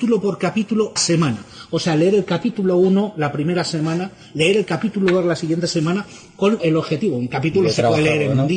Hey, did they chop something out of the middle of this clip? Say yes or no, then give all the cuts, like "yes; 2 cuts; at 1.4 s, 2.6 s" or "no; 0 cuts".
yes; 2 cuts; at 1.0 s, 6.6 s